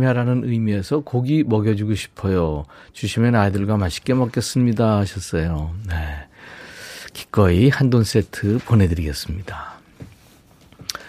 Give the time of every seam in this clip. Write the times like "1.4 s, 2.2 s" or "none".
none